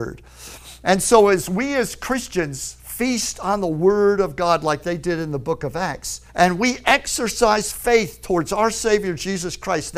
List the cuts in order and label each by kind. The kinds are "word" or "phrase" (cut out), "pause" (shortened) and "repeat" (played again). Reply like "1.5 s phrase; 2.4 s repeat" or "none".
6.3 s pause